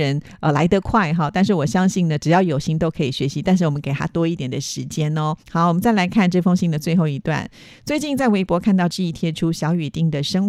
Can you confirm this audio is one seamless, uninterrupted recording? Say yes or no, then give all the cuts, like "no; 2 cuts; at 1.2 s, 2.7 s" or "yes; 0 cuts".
no; 1 cut; at 5.4 s